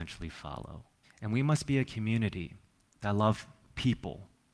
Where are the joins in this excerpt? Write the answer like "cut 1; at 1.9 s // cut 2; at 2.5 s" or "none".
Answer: cut 1; at 1.0 s